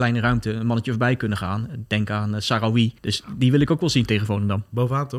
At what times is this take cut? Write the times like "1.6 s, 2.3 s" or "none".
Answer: 3.0 s